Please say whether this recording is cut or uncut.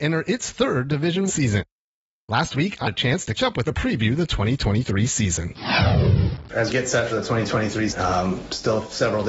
cut